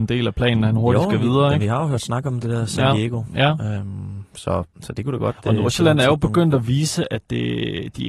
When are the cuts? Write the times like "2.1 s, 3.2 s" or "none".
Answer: 4.7 s